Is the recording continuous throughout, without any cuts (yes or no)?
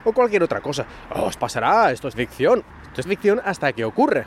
no